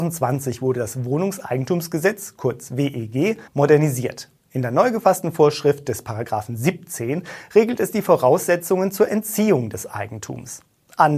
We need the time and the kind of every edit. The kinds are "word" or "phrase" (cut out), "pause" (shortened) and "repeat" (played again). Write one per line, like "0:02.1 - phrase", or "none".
0:03.5 - pause

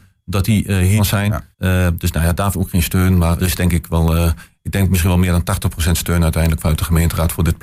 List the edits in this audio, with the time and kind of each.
0:01.0 - phrase
0:01.5 - pause
0:02.5 - word
0:03.4 - word

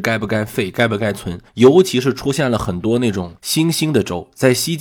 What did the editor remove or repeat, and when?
0:01.5 - pause
0:03.4 - pause

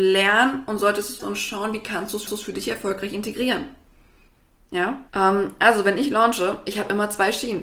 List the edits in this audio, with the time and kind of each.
0:01.2 - word
0:02.3 - repeat
0:05.1 - pause

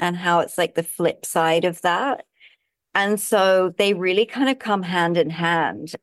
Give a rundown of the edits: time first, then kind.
none

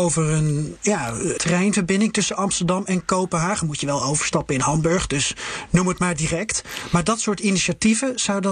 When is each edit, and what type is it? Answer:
0:01.4 - word

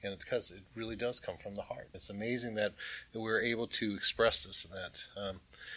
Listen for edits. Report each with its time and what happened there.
0:01.9 - word

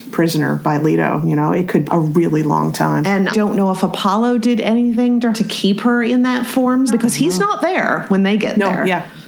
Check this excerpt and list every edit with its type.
0:01.9 - word
0:03.3 - word
0:05.3 - word
0:06.9 - word

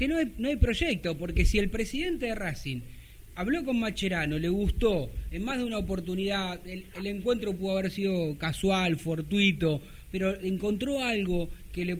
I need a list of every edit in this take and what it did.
none

